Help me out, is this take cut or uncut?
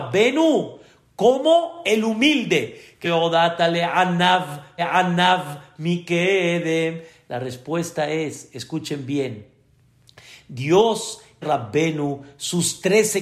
cut